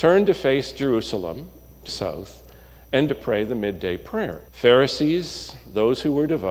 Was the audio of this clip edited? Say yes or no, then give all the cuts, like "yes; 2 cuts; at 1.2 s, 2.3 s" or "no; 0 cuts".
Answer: yes; 3 cuts; at 1.9 s, 3.1 s, 4.5 s